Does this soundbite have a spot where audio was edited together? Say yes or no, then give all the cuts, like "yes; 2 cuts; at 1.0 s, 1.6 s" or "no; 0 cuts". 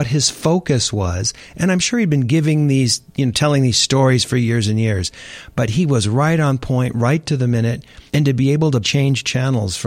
yes; 3 cuts; at 3.1 s, 8.1 s, 8.8 s